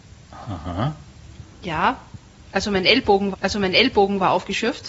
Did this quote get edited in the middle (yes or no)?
yes